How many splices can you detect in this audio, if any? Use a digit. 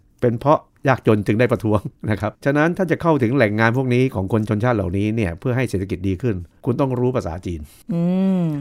1